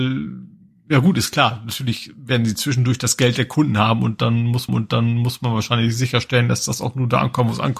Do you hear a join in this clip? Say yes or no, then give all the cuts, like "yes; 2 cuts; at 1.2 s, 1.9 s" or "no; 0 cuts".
yes; 1 cut; at 4.7 s